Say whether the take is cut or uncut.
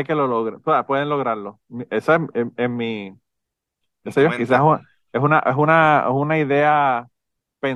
uncut